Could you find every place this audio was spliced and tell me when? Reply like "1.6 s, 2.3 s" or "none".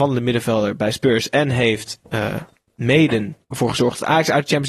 3.4 s